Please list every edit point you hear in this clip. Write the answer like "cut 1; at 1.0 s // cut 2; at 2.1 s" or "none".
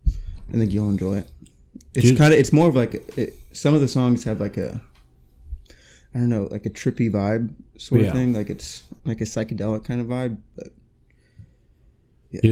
cut 1; at 9.0 s